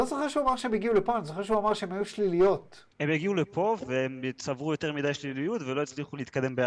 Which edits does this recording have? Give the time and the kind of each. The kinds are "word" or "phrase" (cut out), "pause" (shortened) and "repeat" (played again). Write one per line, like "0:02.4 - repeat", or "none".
0:02.9 - pause